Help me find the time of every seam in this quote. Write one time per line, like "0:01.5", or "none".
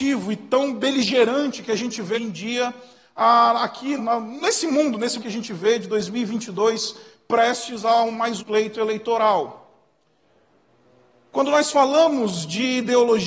0:02.1
0:04.0
0:05.2
0:08.4